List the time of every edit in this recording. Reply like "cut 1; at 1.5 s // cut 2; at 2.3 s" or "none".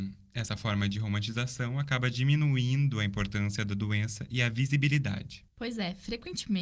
cut 1; at 5.5 s